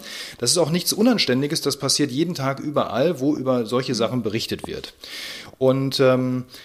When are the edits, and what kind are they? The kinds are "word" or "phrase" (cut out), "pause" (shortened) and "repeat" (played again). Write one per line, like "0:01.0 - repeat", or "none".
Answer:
none